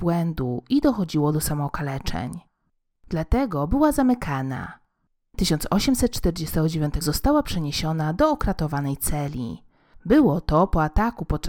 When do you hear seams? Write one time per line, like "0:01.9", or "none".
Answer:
0:05.3
0:07.0